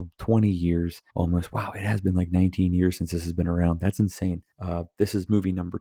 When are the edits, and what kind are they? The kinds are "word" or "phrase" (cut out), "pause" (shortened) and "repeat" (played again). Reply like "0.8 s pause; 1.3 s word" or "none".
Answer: 1.1 s pause; 4.5 s pause